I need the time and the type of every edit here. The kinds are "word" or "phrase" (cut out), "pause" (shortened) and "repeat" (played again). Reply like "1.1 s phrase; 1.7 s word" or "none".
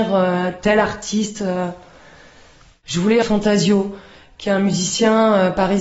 3.2 s word

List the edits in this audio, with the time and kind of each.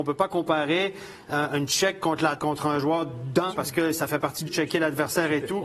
2.4 s word; 3.5 s word; 4.5 s word

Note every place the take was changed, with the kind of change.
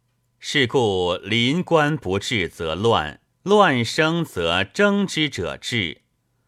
3.3 s pause

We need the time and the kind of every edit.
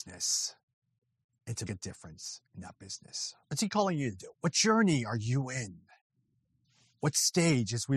1.7 s word; 2.5 s pause; 3.4 s pause; 4.3 s pause

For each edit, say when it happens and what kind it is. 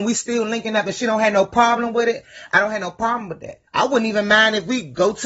3.7 s pause

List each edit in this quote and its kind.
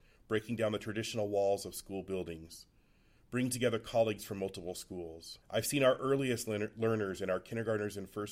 5.4 s pause

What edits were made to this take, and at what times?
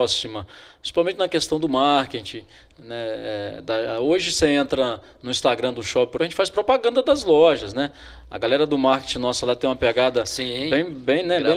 6.2 s word

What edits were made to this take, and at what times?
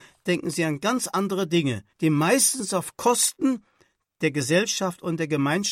1.9 s pause

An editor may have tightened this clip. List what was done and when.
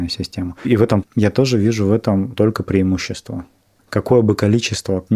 1.0 s word; 2.3 s word

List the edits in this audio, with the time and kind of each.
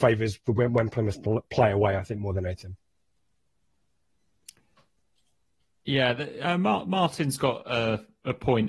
none

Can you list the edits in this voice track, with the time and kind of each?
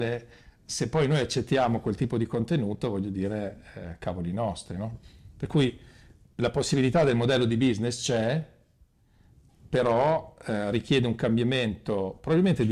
none

